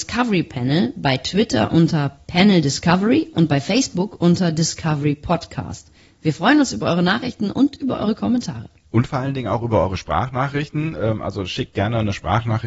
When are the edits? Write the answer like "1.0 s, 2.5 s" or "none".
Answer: none